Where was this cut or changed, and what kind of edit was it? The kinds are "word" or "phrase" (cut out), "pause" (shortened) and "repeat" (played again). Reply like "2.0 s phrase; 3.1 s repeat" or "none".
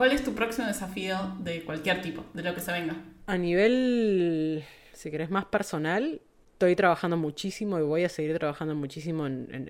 none